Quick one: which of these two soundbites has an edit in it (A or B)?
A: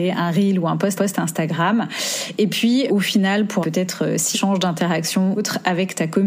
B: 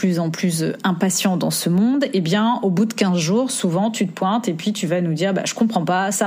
A